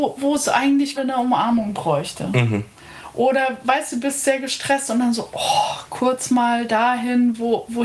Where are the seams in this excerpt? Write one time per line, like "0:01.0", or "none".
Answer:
0:01.0